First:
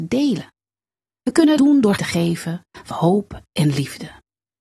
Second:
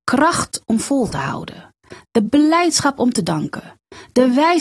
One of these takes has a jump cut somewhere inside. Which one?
first; 3 cuts; at 1.6 s, 2.0 s, 2.9 s

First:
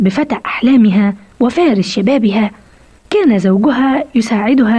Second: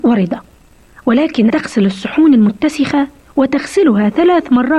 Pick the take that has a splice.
second; 1 cut; at 1.5 s

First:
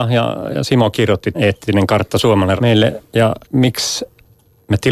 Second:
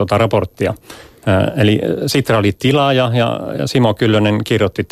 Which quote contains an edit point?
first; 4 cuts; at 0.9 s, 1.3 s, 2.6 s, 3.4 s

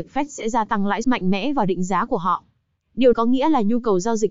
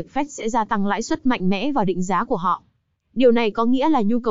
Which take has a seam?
first; 2 cuts; at 1.0 s, 3.1 s

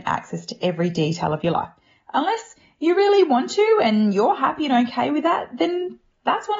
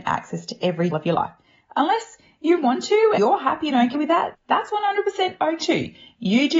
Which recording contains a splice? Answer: second; 6 cuts; at 0.9 s, 2.6 s, 3.2 s, 3.9 s, 4.3 s, 5.6 s

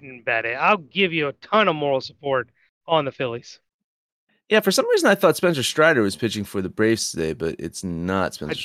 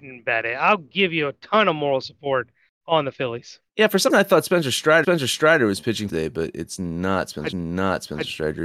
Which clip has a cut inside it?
second; 5 cuts; at 3.7 s, 4.1 s, 5.0 s, 6.1 s, 7.5 s

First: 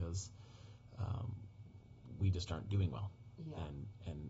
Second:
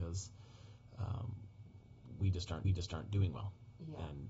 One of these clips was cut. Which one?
second; 1 cut; at 2.6 s

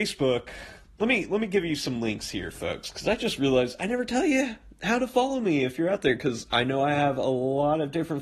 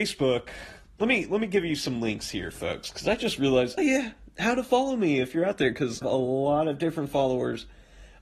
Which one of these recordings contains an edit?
second; 2 cuts; at 3.8 s, 6.0 s

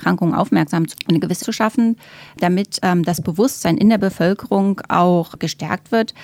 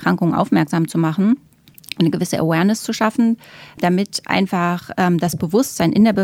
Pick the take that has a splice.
first; 3 cuts; at 0.9 s, 1.4 s, 2.8 s

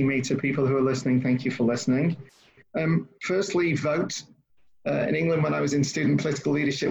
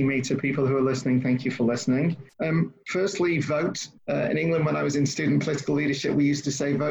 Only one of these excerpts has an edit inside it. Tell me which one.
second; 2 cuts; at 2.3 s, 4.0 s

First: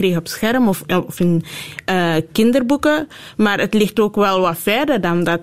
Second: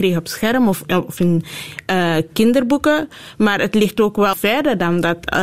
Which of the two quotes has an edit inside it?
second; 1 cut; at 4.3 s

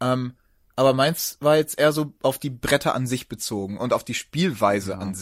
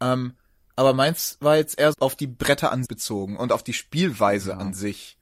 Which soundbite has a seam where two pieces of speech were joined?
second; 2 cuts; at 1.9 s, 2.9 s

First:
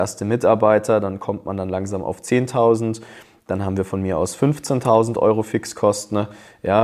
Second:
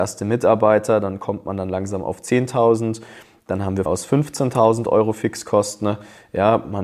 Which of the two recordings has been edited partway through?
second; 1 cut; at 3.9 s

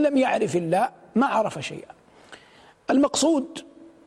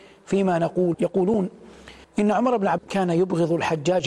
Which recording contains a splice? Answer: second; 3 cuts; at 0.9 s, 2.0 s, 2.8 s

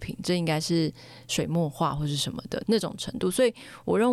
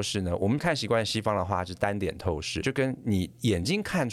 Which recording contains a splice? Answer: second; 1 cut; at 2.6 s

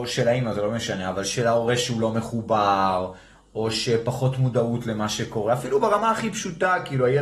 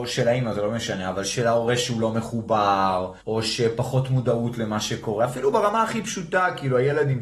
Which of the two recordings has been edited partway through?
second; 1 cut; at 3.2 s

